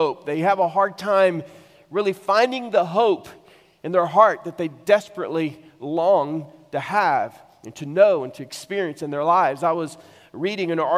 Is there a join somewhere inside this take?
no; 0 cuts

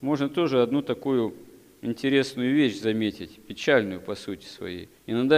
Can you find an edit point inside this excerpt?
no; 0 cuts

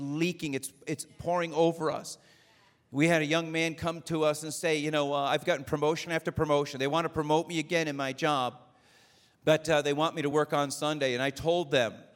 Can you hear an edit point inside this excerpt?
no; 0 cuts

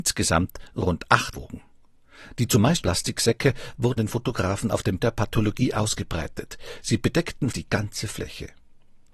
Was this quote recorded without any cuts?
no; 5 cuts; at 1.3 s, 2.8 s, 4.0 s, 5.0 s, 7.5 s

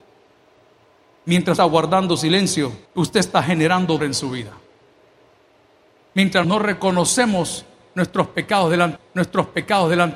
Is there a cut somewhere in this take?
yes; 5 cuts; at 1.6 s, 2.9 s, 4.0 s, 6.4 s, 9.0 s

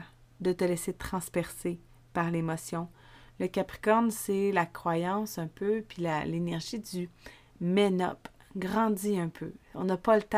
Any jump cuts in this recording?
no; 0 cuts

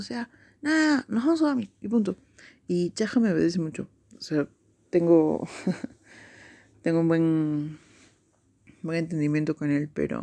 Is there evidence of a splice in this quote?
no; 0 cuts

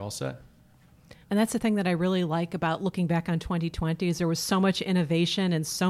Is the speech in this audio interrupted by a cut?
yes; 1 cut; at 1.2 s

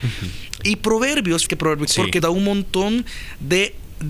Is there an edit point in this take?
yes; 3 cuts; at 1.5 s, 1.8 s, 2.2 s

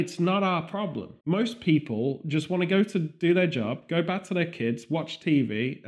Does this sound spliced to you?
yes; 1 cut; at 1.2 s

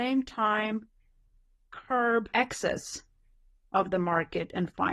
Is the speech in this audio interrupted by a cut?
yes; 1 cut; at 2.3 s

